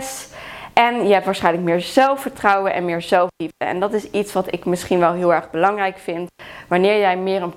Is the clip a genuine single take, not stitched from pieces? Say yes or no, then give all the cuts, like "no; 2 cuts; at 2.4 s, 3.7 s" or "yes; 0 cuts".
yes; 0 cuts